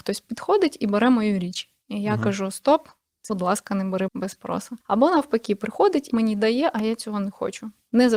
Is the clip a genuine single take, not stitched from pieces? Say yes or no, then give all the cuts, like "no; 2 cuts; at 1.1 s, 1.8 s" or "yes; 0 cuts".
no; 4 cuts; at 3.3 s, 4.1 s, 4.8 s, 6.1 s